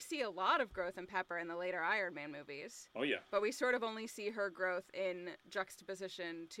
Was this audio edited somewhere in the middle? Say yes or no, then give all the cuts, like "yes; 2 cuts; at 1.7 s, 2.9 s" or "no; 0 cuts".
no; 0 cuts